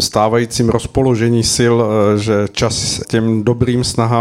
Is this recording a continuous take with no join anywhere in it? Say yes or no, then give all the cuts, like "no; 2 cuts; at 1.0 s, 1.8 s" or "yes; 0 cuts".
no; 1 cut; at 3.0 s